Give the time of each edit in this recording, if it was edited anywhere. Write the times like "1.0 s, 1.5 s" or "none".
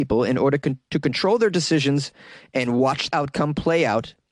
3.1 s